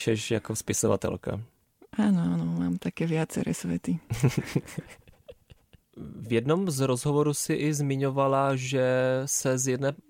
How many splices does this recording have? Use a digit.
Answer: 0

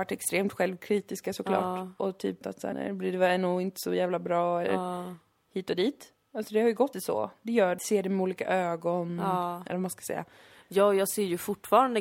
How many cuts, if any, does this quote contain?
5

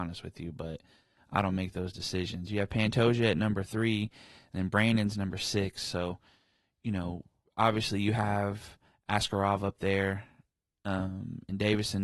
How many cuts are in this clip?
0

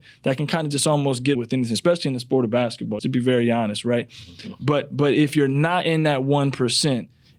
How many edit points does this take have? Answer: 2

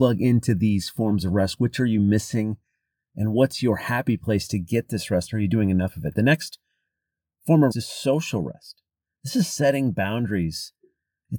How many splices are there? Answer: 1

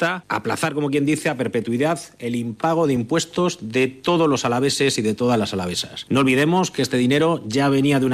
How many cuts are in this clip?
0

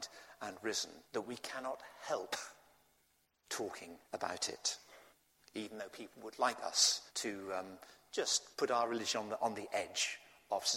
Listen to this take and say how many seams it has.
5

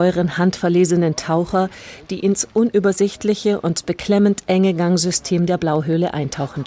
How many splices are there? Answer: 0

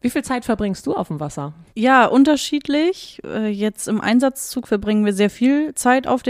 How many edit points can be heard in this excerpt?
1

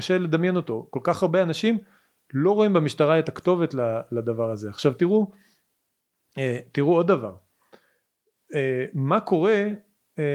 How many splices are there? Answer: 0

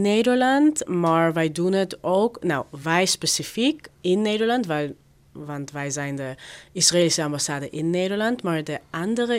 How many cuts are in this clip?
0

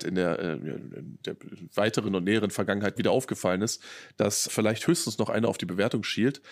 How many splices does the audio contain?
3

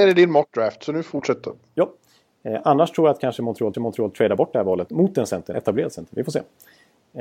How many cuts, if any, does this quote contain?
4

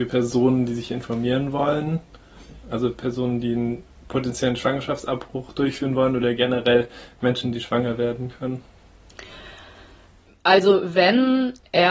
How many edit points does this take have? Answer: 0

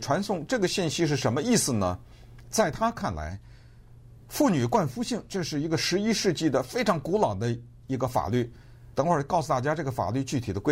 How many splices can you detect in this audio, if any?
2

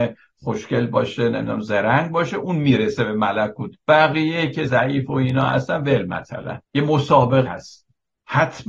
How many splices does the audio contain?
4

